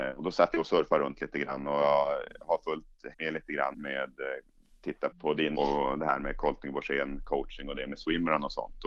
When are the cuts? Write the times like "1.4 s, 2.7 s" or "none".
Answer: 3.1 s, 3.7 s, 5.1 s, 5.5 s